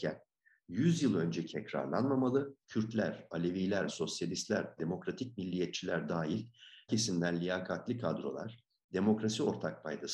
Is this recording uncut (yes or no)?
no